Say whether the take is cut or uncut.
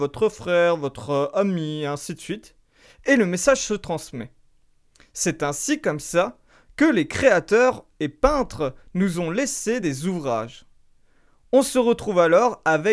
uncut